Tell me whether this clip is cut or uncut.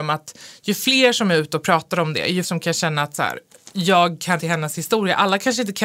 cut